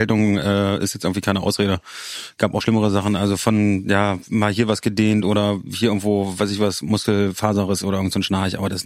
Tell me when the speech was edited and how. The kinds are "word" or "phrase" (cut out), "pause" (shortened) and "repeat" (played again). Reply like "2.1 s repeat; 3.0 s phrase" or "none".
2.6 s word